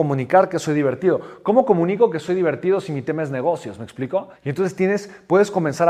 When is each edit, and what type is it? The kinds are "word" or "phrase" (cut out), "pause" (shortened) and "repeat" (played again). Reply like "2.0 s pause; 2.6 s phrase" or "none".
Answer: 4.4 s pause